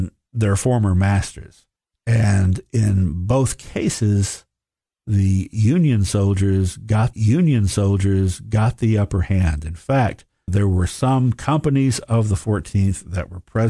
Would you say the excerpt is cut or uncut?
cut